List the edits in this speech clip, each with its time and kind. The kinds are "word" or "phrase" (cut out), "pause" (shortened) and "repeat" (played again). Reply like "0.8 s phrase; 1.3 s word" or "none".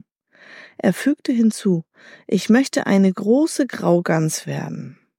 none